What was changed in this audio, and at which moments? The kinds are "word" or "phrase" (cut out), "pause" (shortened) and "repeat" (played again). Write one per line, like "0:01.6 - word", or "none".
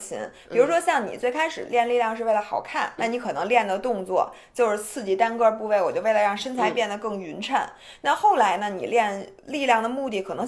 0:03.0 - word
0:09.4 - pause